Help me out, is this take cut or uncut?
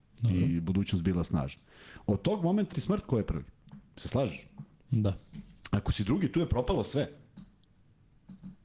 cut